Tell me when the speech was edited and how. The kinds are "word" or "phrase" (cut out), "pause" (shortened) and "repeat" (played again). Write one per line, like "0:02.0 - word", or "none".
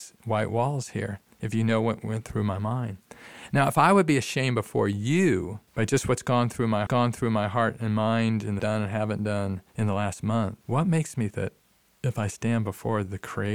0:05.7 - pause
0:06.9 - repeat
0:08.6 - phrase
0:09.7 - pause
0:10.6 - pause
0:11.3 - word